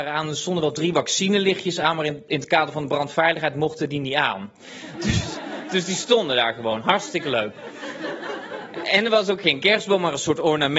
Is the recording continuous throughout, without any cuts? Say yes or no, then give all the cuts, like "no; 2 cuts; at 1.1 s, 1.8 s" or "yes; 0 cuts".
yes; 0 cuts